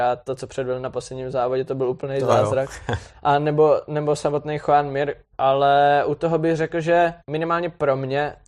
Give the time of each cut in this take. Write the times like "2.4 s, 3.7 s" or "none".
7.2 s